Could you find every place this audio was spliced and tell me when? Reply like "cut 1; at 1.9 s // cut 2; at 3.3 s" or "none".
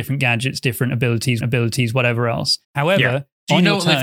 cut 1; at 1.4 s // cut 2; at 2.6 s